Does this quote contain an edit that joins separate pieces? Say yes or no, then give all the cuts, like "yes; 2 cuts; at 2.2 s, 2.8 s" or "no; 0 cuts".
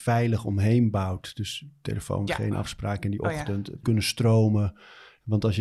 yes; 2 cuts; at 2.3 s, 3.8 s